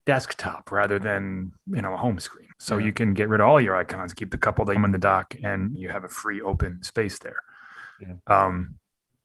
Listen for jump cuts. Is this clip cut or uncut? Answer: cut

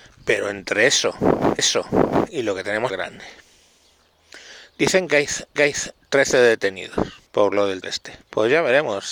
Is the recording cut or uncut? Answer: cut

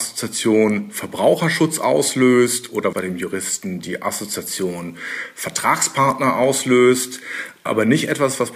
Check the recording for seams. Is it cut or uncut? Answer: cut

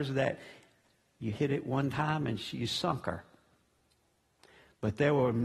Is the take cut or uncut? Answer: uncut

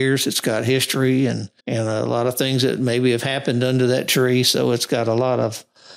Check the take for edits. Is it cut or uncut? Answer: cut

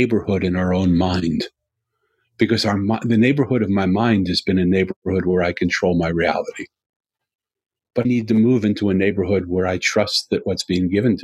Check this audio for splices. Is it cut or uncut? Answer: cut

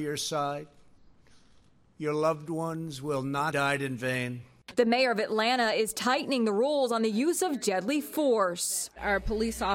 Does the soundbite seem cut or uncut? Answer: cut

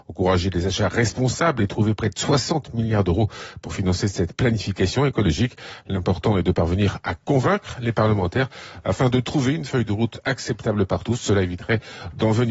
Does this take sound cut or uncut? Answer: uncut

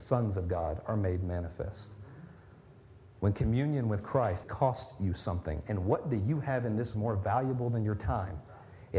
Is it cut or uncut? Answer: cut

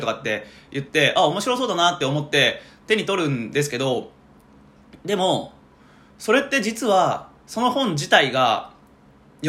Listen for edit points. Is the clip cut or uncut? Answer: uncut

